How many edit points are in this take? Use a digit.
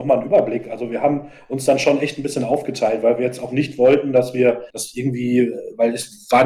1